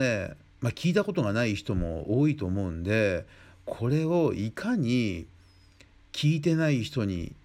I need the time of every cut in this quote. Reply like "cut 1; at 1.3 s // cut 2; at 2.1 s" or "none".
none